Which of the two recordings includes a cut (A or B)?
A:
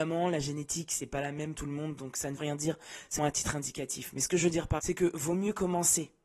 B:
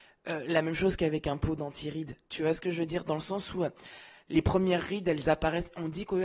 A